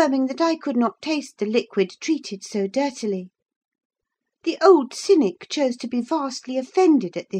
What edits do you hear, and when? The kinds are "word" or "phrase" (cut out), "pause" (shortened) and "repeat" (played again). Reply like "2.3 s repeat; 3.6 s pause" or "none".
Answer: none